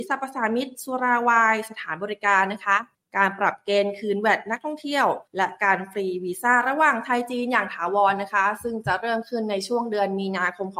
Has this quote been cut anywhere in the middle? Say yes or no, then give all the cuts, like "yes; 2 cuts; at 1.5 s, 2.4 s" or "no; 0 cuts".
yes; 2 cuts; at 2.9 s, 5.3 s